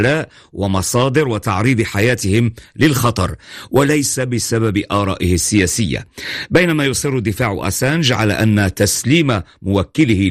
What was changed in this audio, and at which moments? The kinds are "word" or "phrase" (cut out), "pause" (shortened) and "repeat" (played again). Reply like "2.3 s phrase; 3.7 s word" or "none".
none

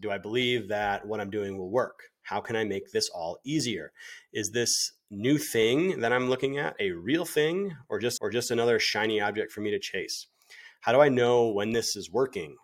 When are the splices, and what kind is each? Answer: 8.2 s repeat

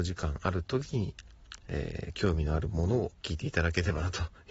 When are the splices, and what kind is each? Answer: 3.2 s pause

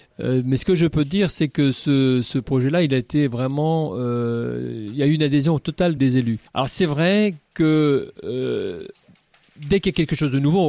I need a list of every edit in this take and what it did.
6.0 s word; 6.5 s pause

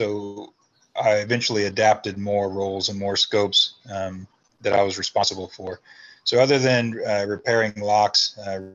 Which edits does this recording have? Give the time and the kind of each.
4.5 s pause

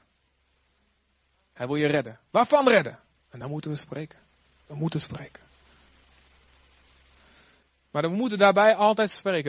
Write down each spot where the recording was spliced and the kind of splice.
none

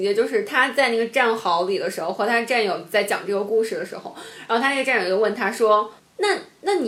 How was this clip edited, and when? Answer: 6.0 s pause

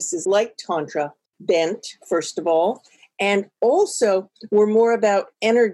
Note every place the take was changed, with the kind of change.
1.3 s phrase

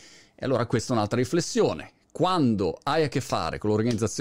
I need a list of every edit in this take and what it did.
none

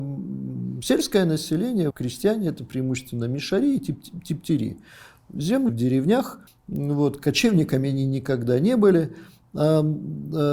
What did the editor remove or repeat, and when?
1.9 s word; 5.7 s phrase; 6.5 s pause

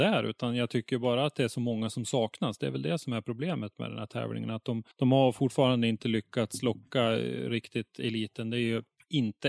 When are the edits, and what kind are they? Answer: 4.9 s pause

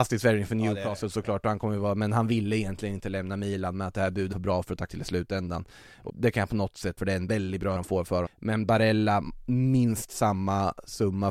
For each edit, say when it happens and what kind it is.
4.3 s word; 4.9 s word; 6.1 s word; 7.0 s word; 7.8 s word; 8.3 s word

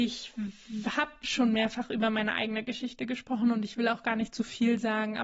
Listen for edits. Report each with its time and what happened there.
none

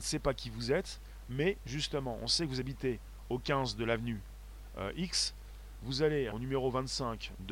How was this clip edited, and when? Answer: 6.3 s phrase

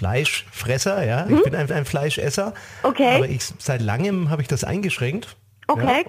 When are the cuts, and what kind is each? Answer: 1.3 s word; 1.7 s repeat

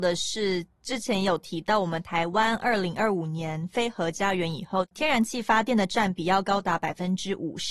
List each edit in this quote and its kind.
none

